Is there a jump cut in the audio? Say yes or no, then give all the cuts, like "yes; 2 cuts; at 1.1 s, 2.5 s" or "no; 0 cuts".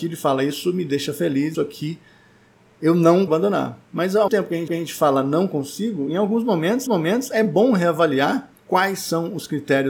yes; 6 cuts; at 1.5 s, 3.3 s, 4.3 s, 4.7 s, 6.9 s, 8.6 s